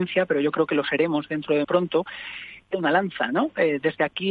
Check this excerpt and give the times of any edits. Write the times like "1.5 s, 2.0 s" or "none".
1.6 s, 2.6 s